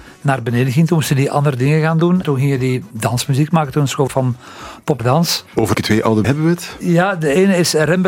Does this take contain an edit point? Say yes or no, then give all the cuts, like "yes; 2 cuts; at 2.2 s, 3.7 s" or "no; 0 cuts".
yes; 5 cuts; at 2.2 s, 4.1 s, 5.0 s, 5.7 s, 6.2 s